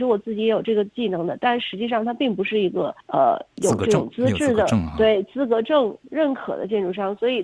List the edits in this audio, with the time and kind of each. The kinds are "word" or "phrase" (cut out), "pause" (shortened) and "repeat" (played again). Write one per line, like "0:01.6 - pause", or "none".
0:03.0 - pause